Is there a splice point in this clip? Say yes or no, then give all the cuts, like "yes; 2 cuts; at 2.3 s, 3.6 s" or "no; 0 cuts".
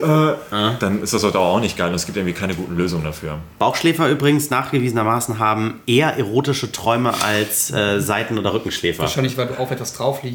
no; 0 cuts